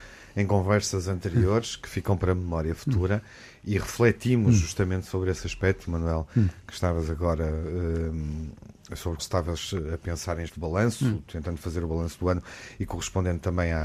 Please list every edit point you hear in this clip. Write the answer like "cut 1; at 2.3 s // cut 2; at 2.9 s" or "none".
cut 1; at 9.2 s // cut 2; at 10.5 s